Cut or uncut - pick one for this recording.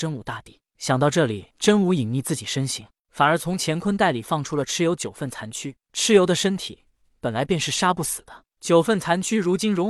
cut